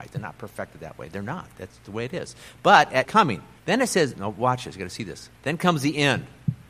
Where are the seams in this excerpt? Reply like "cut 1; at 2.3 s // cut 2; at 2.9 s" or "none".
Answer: cut 1; at 1.8 s // cut 2; at 3.0 s // cut 3; at 3.6 s // cut 4; at 4.1 s // cut 5; at 5.3 s